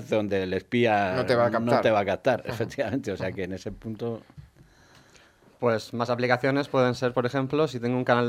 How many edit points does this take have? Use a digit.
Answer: 0